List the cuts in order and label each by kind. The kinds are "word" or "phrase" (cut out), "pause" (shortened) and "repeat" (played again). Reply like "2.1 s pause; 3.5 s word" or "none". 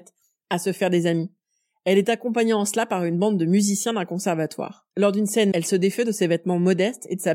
4.9 s pause; 5.5 s word